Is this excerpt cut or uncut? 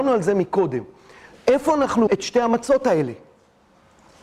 cut